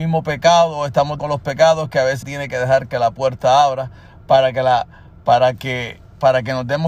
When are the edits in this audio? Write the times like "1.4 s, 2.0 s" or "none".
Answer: 1.2 s, 2.2 s